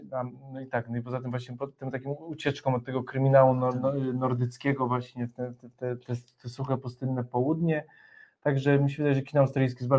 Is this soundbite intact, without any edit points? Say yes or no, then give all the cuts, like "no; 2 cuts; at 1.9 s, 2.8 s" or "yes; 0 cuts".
yes; 0 cuts